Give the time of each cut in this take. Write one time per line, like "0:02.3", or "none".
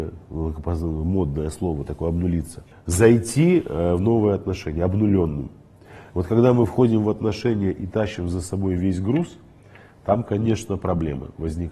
0:02.7

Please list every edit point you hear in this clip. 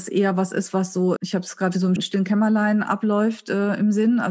0:01.2
0:02.0

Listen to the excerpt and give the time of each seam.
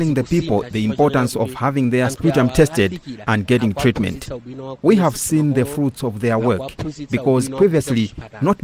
none

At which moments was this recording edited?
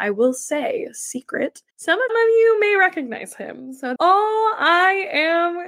0:01.7
0:02.1
0:04.0

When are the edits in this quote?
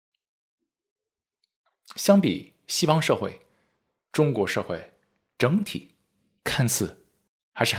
none

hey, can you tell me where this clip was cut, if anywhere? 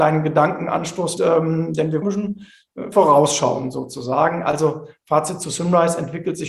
0:01.2
0:02.0
0:02.9

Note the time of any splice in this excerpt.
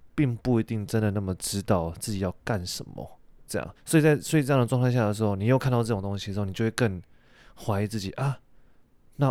0:03.8

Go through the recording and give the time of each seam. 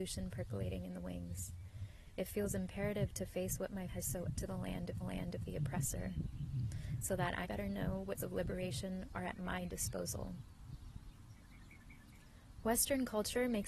0:03.9
0:04.4
0:05.0
0:07.4
0:08.2

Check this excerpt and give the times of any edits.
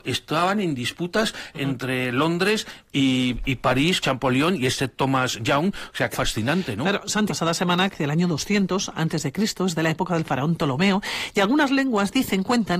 0:01.5
0:04.0
0:04.9
0:06.1
0:07.3
0:07.9

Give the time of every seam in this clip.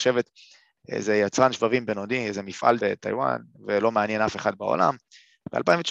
0:02.8

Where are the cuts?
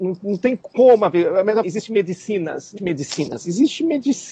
0:01.6
0:02.8

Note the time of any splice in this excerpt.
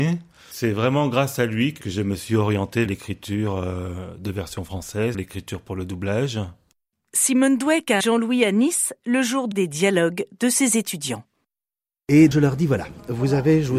0:02.9
0:05.1
0:08.0
0:09.5
0:12.3

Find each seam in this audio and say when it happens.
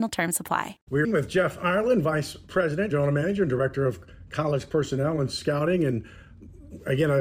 0:01.0
0:02.9

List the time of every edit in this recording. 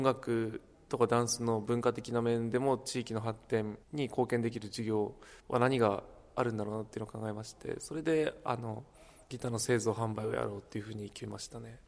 0:03.8
0:05.4

